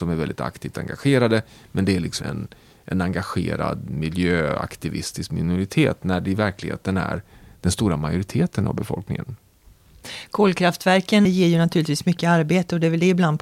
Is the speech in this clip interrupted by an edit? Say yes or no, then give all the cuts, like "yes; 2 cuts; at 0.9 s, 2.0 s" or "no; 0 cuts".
yes; 2 cuts; at 2.2 s, 11.2 s